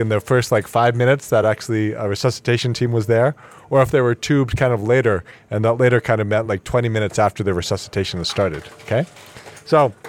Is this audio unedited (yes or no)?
yes